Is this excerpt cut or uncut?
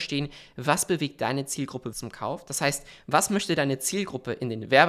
cut